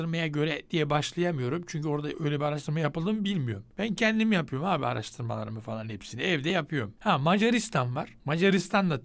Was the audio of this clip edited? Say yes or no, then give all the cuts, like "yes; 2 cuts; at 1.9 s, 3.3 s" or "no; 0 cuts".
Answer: no; 0 cuts